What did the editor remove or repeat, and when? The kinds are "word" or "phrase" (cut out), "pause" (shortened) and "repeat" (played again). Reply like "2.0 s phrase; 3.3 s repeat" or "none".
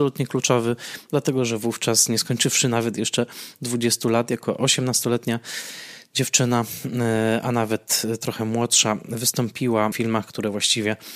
9.9 s phrase